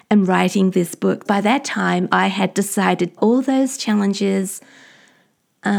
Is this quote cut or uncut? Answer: cut